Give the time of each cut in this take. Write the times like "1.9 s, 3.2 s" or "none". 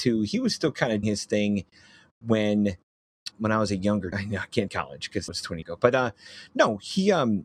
1.0 s, 3.3 s, 4.1 s, 4.7 s, 5.3 s, 5.6 s